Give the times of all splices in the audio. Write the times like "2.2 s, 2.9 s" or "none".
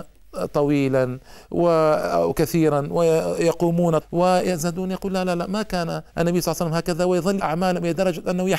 4.0 s, 6.1 s, 7.4 s